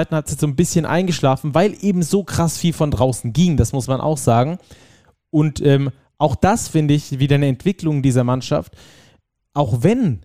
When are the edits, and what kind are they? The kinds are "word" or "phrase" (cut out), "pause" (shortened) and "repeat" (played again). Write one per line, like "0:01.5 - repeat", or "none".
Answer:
none